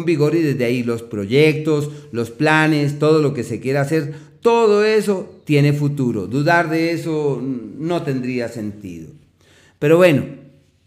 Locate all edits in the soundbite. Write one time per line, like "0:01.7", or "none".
none

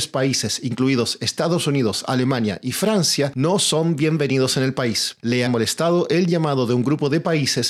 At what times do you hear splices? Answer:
0:05.5

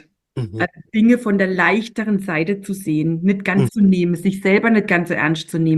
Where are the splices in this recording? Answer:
0:03.7

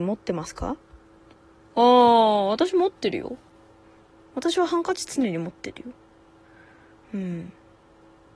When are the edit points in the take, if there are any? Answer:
none

